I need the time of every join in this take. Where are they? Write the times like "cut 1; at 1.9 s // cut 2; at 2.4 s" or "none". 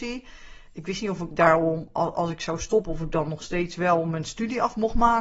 none